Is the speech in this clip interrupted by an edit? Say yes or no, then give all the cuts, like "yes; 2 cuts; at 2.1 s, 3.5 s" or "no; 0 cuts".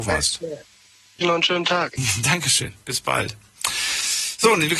yes; 1 cut; at 1.2 s